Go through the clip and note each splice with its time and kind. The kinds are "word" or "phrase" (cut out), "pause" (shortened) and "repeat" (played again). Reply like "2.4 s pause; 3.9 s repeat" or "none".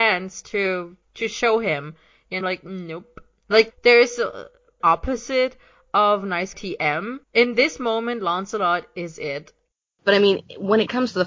1.0 s pause; 2.4 s phrase; 3.7 s word; 4.8 s phrase; 6.5 s word; 7.2 s pause